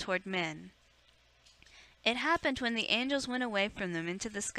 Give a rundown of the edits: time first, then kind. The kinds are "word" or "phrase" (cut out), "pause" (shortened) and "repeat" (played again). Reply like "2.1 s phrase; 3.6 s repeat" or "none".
none